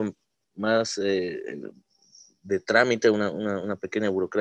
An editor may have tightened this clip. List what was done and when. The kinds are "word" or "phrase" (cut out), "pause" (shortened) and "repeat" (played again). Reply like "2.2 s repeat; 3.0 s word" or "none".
none